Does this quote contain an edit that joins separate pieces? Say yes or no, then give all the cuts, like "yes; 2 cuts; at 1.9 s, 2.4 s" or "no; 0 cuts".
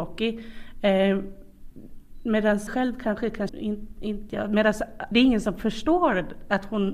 yes; 4 cuts; at 2.7 s, 3.5 s, 4.3 s, 5.1 s